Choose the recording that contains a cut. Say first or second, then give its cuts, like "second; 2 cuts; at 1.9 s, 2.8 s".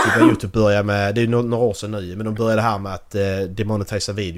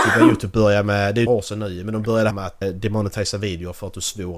second; 3 cuts; at 1.3 s, 2.3 s, 2.6 s